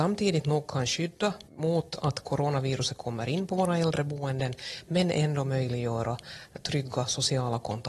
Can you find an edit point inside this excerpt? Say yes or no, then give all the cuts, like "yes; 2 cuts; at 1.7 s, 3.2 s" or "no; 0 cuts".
yes; 1 cut; at 1.5 s